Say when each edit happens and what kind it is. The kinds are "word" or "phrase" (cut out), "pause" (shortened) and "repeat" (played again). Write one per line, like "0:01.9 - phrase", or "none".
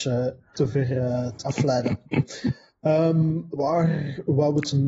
0:01.4 - word
0:03.5 - word